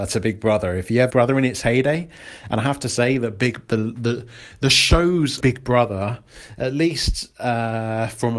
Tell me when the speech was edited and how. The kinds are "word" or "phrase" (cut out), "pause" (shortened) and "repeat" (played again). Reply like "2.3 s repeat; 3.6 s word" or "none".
1.1 s phrase; 5.4 s word